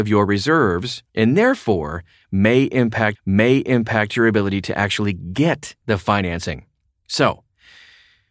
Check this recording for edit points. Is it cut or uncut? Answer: cut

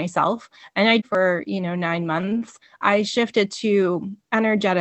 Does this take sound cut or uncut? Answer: cut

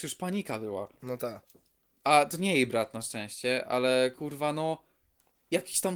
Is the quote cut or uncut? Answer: uncut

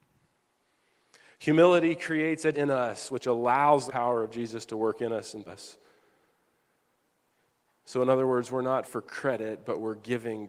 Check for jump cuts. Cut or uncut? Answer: cut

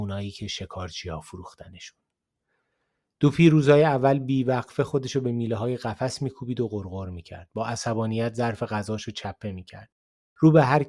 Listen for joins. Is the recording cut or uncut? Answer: uncut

